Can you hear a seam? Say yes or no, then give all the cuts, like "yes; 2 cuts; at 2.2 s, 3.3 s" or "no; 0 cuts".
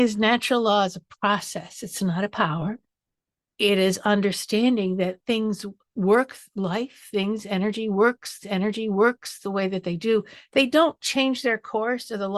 yes; 1 cut; at 8.4 s